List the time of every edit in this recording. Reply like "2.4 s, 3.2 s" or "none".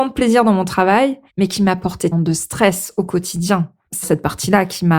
1.3 s, 2.1 s, 4.0 s